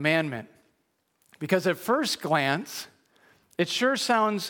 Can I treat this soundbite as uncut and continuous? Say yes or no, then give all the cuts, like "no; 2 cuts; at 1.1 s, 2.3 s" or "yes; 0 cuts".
yes; 0 cuts